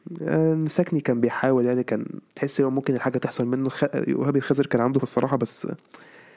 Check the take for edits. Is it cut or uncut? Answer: cut